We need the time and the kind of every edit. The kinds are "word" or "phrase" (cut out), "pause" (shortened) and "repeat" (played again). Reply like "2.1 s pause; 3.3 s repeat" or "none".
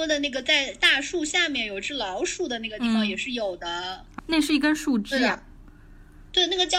4.2 s word